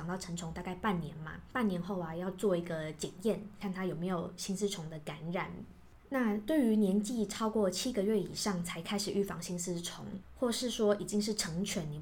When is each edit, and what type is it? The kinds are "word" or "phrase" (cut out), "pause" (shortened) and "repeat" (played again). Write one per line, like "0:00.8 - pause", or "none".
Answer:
none